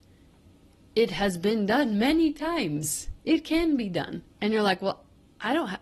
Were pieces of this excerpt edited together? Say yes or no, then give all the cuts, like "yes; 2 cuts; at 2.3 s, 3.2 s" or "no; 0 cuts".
yes; 1 cut; at 4.3 s